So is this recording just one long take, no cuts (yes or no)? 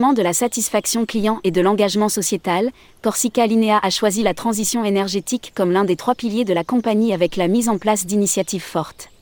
yes